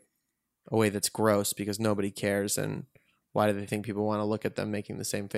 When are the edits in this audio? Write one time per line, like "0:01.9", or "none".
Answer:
none